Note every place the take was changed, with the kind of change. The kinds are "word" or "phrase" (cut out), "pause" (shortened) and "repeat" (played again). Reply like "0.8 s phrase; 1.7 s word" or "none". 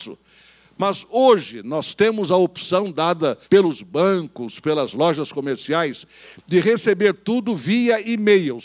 3.4 s pause